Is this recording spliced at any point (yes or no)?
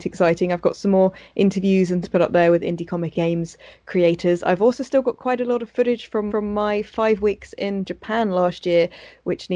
yes